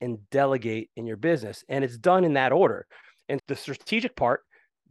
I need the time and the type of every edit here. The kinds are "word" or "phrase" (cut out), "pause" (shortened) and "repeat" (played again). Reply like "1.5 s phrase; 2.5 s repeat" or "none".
3.4 s word